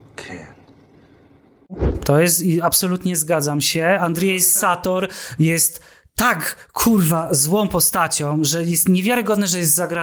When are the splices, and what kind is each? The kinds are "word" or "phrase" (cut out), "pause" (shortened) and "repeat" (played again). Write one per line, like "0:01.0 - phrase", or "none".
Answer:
none

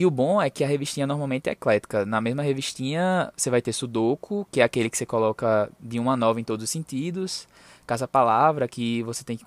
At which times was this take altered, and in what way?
none

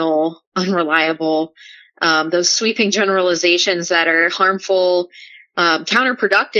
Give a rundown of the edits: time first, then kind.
none

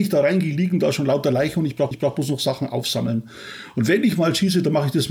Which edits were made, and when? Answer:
0:01.9 - repeat

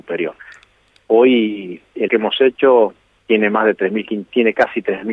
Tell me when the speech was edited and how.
0:02.1 - word

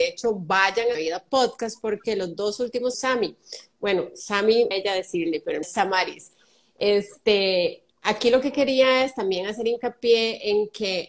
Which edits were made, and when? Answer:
0:00.9 - phrase
0:02.9 - phrase
0:04.7 - phrase
0:05.6 - word
0:07.9 - pause

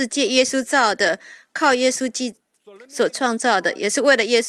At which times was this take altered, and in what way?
none

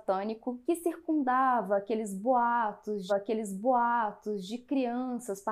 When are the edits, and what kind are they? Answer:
0:03.1 - repeat

